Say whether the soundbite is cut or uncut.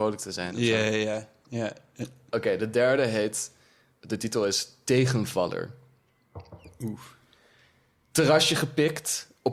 uncut